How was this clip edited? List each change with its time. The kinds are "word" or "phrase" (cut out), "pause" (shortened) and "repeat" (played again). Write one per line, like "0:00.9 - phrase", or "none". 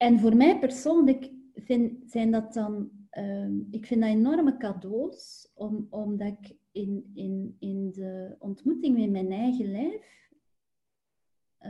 none